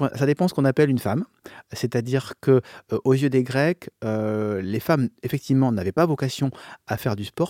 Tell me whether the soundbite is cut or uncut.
uncut